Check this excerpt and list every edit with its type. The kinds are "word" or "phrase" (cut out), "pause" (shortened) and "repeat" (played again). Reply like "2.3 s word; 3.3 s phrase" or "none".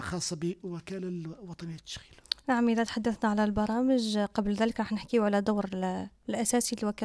none